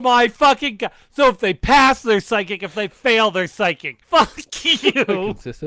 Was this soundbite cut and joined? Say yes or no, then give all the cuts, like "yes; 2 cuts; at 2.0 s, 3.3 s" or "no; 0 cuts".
yes; 1 cut; at 4.0 s